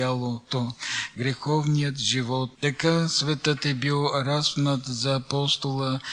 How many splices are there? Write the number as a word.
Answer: one